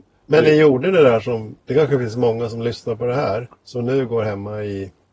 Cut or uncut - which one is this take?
cut